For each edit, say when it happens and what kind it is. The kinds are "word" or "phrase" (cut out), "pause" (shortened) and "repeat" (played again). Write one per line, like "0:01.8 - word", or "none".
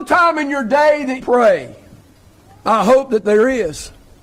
0:01.2 - word